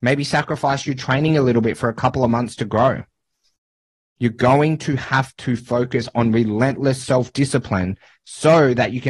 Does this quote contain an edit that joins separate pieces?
no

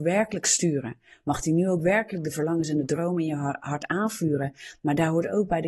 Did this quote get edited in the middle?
no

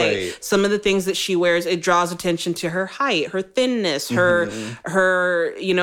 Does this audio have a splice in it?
no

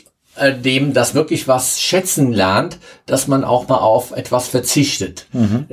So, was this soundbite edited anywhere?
yes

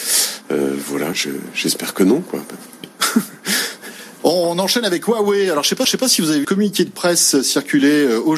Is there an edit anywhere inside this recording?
yes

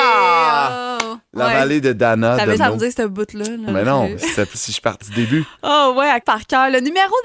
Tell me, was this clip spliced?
yes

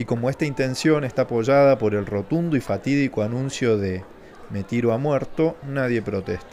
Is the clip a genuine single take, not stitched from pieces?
yes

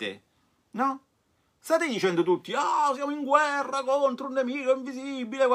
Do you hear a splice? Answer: no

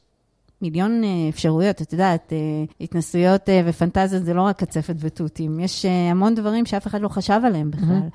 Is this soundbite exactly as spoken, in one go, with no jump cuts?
no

